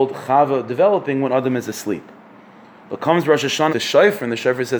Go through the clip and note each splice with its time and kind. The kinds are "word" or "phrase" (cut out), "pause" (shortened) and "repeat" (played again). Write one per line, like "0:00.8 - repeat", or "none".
0:03.7 - word